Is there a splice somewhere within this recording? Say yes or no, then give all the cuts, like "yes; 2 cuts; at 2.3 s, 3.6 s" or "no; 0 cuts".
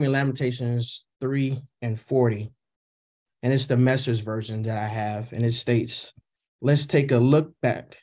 no; 0 cuts